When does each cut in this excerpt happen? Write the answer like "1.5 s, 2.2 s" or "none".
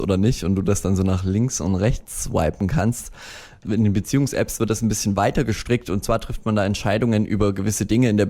none